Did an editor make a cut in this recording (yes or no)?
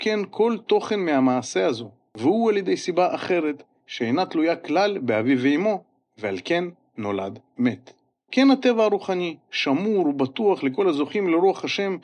no